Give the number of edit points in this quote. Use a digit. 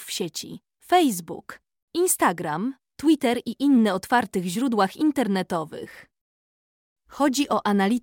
0